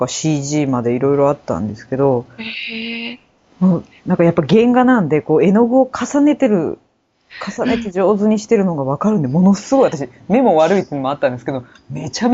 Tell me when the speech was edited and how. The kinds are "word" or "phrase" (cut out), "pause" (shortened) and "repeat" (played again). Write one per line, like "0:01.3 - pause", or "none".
none